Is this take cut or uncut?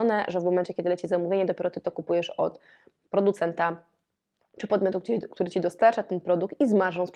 uncut